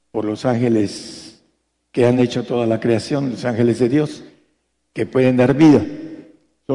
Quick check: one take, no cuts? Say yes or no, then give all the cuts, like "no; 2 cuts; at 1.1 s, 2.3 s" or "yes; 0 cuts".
yes; 0 cuts